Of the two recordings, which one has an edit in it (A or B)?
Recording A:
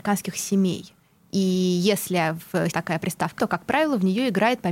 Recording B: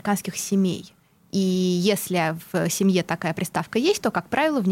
A